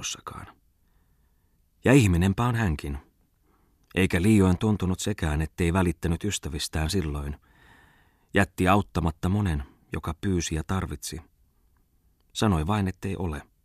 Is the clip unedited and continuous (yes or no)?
yes